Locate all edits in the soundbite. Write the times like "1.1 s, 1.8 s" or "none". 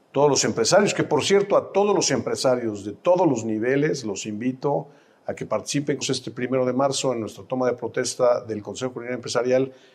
6.0 s